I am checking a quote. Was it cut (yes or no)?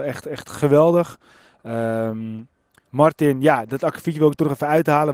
no